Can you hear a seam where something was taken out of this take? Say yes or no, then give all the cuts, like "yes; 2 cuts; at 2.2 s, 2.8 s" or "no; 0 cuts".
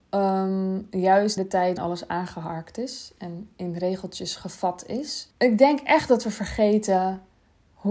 yes; 3 cuts; at 1.4 s, 1.8 s, 5.3 s